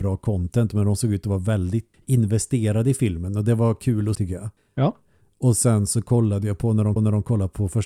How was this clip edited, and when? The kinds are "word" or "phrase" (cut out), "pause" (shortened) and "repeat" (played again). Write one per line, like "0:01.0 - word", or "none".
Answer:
0:01.9 - word
0:04.1 - word
0:04.6 - pause
0:07.0 - repeat